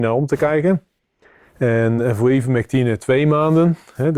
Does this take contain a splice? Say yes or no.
no